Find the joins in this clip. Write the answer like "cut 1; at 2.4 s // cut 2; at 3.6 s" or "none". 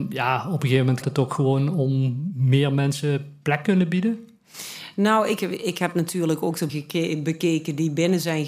cut 1; at 1.0 s // cut 2; at 6.7 s